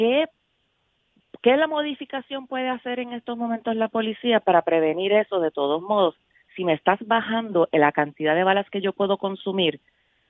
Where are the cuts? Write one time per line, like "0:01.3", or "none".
none